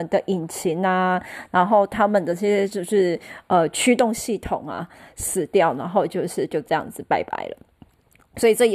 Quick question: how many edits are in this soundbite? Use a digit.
0